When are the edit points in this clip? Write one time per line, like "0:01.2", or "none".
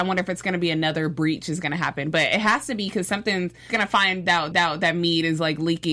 0:03.7
0:04.5